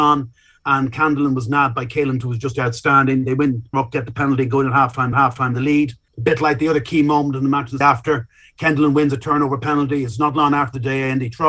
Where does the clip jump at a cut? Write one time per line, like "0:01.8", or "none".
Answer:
0:02.2
0:03.7
0:05.1
0:06.1
0:07.8